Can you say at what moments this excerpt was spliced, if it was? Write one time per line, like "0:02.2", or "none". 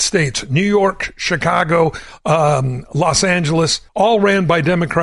0:03.9